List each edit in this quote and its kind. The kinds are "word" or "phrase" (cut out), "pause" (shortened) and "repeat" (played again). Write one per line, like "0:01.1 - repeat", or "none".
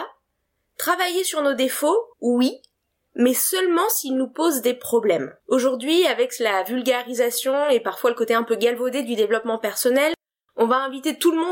0:02.1 - pause
0:05.4 - pause